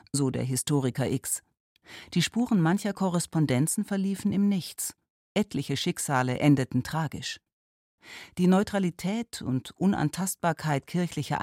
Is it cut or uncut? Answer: uncut